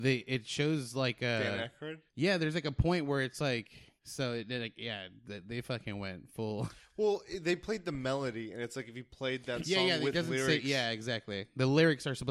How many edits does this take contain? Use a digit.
2